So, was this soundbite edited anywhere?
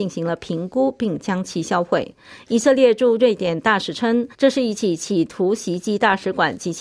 yes; 1 cut; at 4.3 s

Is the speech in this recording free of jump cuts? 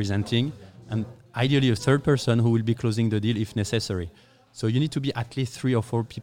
yes; 0 cuts

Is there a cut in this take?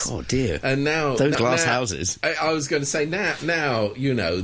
yes; 1 cut; at 1.3 s

